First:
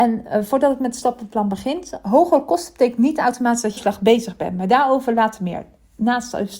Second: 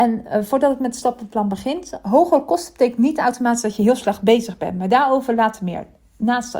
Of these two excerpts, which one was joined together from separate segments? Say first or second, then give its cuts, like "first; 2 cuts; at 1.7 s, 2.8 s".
first; 1 cut; at 3.8 s